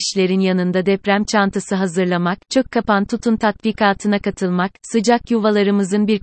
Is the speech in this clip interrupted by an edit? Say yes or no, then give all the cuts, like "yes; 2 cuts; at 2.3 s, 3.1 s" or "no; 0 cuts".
no; 0 cuts